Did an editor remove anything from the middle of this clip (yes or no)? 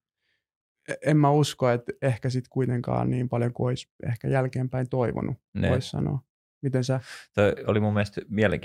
no